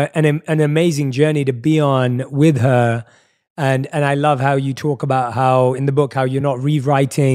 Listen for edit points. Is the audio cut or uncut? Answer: uncut